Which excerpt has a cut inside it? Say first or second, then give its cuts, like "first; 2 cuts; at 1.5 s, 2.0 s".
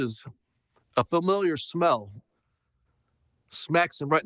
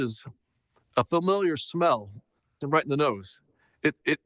second; 1 cut; at 2.6 s